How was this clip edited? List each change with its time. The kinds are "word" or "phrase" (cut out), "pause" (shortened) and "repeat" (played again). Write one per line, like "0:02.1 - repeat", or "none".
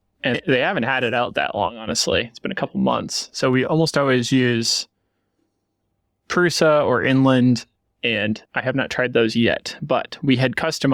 0:08.5 - pause